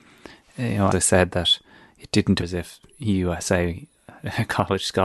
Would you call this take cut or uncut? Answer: cut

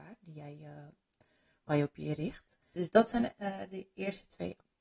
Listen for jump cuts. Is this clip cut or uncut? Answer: uncut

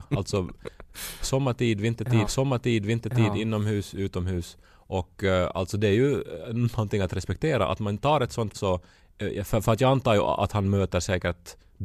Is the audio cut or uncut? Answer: cut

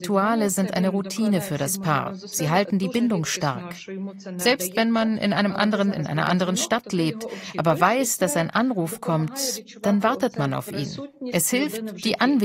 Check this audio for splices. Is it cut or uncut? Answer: cut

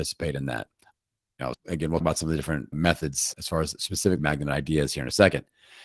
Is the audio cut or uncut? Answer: cut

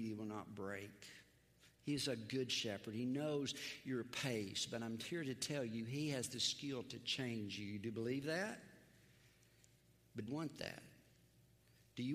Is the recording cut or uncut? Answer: cut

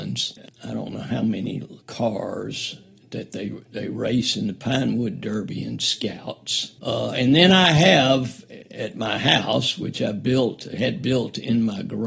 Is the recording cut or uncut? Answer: cut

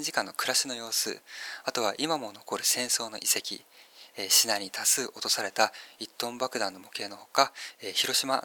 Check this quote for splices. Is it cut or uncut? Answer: uncut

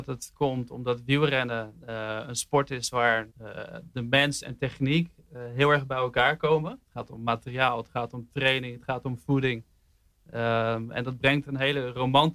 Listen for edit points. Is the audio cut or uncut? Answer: cut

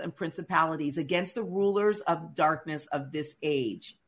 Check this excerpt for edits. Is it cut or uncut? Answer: uncut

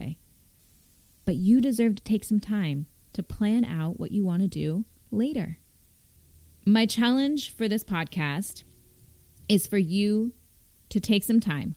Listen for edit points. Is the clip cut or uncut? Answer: uncut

